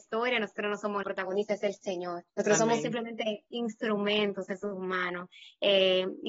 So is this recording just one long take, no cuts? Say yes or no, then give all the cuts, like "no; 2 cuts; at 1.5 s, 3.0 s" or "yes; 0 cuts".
no; 2 cuts; at 1.0 s, 2.3 s